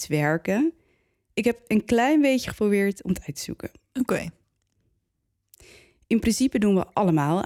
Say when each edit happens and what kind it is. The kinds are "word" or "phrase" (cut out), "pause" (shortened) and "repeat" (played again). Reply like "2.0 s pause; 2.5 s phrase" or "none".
none